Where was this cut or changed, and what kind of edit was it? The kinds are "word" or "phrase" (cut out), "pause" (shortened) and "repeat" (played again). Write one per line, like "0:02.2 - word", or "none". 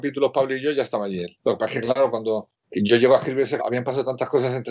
0:01.4 - pause
0:02.6 - pause
0:03.6 - word